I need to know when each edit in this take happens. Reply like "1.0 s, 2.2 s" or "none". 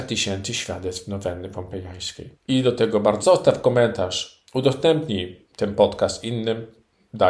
2.3 s, 3.2 s